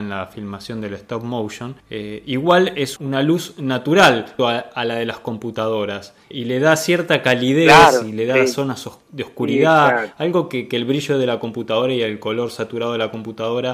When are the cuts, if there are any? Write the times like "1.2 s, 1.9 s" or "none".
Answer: 1.8 s, 3.0 s, 4.4 s, 6.3 s, 9.0 s